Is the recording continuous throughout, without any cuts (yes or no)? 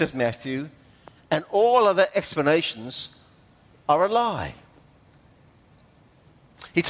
yes